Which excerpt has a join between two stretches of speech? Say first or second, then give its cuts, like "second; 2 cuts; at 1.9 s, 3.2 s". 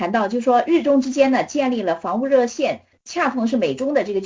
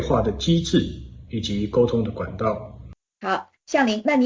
second; 1 cut; at 3.0 s